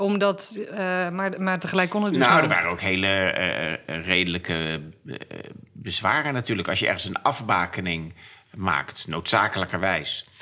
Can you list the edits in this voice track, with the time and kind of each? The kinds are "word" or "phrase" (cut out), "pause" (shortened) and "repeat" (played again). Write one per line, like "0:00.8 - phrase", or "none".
none